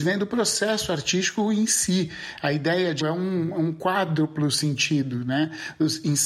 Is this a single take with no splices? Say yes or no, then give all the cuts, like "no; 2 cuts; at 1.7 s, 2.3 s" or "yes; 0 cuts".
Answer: no; 1 cut; at 3.0 s